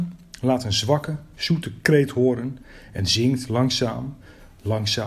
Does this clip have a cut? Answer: no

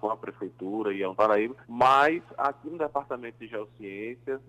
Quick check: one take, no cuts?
no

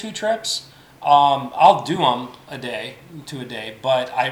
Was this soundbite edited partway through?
no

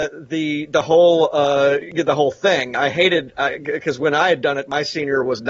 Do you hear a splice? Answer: no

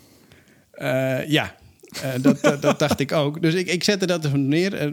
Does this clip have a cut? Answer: no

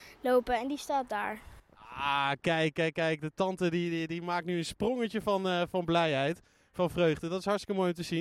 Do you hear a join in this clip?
no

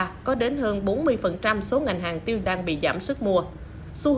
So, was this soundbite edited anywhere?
yes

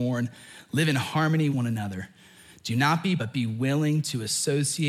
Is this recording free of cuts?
no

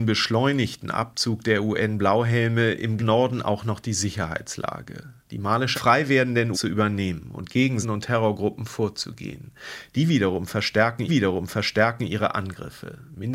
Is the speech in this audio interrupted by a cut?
yes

